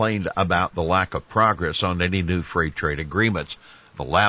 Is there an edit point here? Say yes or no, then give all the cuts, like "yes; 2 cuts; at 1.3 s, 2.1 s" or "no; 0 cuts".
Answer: no; 0 cuts